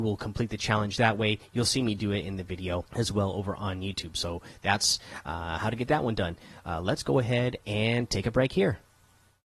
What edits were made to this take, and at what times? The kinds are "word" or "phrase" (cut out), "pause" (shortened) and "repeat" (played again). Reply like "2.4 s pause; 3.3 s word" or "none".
2.9 s pause

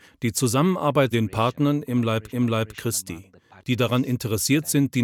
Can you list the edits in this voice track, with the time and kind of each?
1.1 s word; 2.3 s repeat

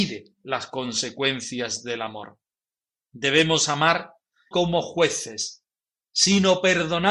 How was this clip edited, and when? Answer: 4.5 s word

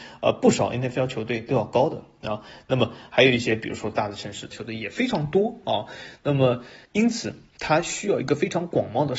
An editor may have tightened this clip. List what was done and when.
4.5 s phrase; 6.8 s pause

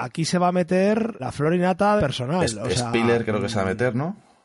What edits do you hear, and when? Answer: 1.2 s word; 2.0 s word

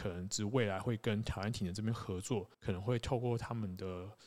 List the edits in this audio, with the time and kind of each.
2.5 s pause

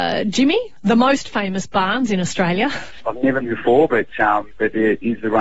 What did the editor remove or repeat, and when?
3.4 s phrase

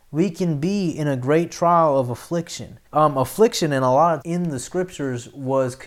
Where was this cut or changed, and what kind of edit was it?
2.9 s pause; 4.2 s word

